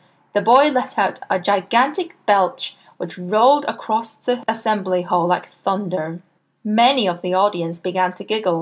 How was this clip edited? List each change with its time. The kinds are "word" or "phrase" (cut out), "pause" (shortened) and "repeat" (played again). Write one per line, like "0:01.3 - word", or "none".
0:06.4 - pause